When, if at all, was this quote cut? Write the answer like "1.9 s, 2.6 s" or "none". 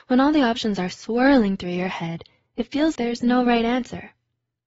3.0 s

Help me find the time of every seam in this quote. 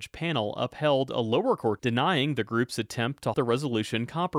1.8 s, 3.3 s

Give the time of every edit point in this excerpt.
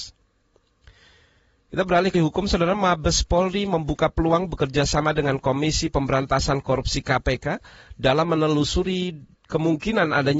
2.1 s

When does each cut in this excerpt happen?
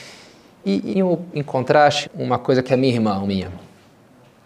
0.9 s, 2.0 s, 2.7 s, 3.3 s

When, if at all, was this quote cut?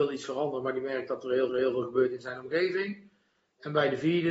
1.5 s

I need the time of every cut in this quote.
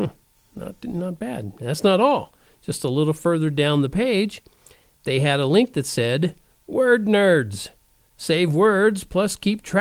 none

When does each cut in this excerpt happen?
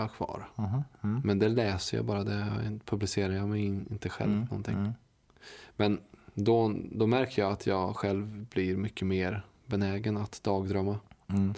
6.1 s

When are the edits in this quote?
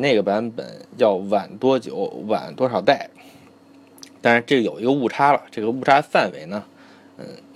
none

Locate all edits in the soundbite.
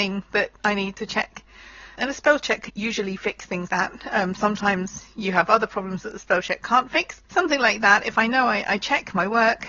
2.0 s, 2.7 s, 3.7 s, 7.2 s

